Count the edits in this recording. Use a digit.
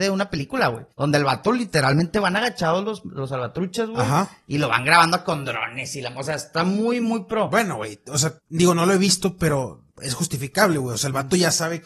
3